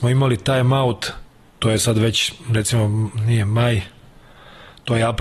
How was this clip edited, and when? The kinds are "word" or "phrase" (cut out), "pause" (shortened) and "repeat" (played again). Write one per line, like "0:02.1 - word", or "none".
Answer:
none